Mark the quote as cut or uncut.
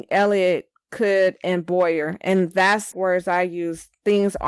cut